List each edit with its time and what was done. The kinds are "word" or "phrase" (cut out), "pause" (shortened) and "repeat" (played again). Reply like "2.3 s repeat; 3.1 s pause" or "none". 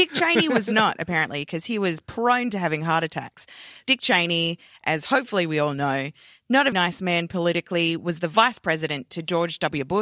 6.7 s word